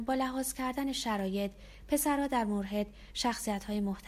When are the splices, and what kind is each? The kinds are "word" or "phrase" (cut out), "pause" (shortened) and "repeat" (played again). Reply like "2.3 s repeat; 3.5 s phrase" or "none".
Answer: none